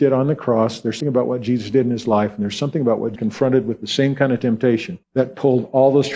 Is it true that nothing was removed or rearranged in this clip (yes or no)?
no